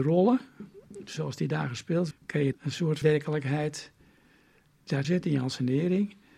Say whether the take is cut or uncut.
cut